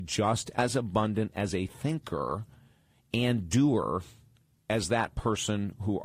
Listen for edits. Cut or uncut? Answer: uncut